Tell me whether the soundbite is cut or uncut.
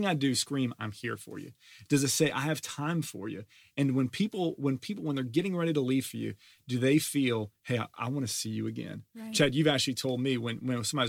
uncut